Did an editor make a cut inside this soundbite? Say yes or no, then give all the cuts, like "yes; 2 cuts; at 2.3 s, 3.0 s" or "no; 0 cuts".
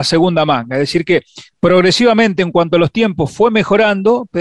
no; 0 cuts